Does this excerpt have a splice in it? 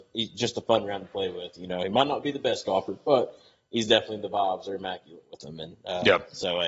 no; 0 cuts

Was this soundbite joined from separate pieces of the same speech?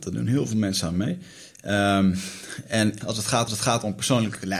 yes; 2 cuts; at 3.0 s, 3.5 s

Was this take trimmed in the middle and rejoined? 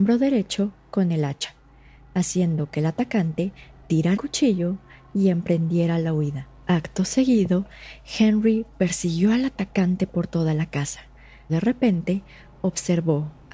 yes; 2 cuts; at 4.2 s, 11.5 s

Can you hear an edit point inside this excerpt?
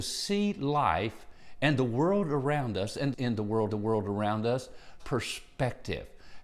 yes; 3 cuts; at 3.1 s, 3.7 s, 5.0 s

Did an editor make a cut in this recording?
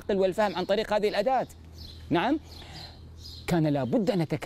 no; 0 cuts

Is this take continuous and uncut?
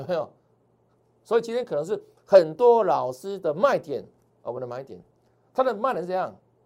yes; 0 cuts

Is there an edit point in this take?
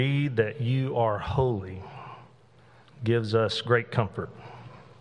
no; 0 cuts

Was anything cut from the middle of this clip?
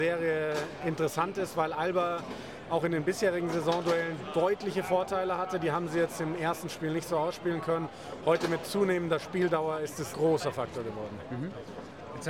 yes; 1 cut; at 10.1 s

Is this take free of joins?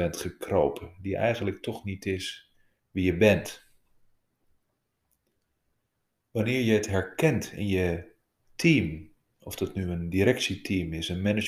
no; 1 cut; at 2.8 s

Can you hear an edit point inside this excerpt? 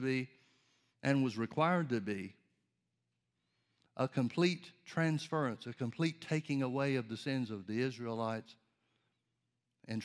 no; 0 cuts

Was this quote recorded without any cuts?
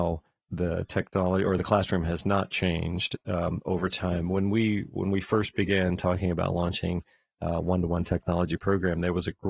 yes; 0 cuts

